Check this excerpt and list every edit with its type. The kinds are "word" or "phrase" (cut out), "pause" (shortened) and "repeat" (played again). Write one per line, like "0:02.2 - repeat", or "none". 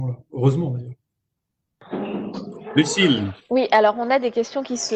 none